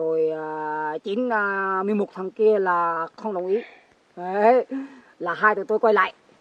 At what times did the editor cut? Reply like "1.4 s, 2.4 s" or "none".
none